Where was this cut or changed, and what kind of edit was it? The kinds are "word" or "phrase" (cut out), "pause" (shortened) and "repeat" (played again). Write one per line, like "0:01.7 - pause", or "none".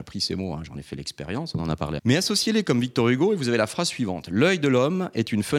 0:02.0 - word